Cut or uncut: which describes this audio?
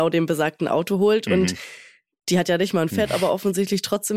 cut